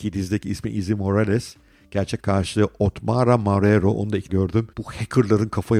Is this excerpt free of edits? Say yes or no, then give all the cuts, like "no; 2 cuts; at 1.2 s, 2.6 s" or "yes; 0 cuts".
no; 3 cuts; at 2.2 s, 4.3 s, 4.7 s